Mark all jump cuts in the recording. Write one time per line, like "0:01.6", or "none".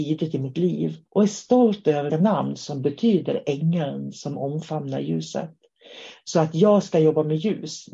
0:01.1
0:02.1